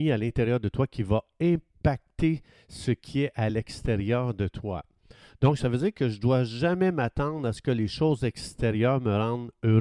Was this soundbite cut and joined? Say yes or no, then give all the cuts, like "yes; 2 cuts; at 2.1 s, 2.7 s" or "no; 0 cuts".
no; 0 cuts